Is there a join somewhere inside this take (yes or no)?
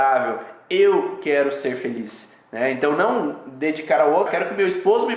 yes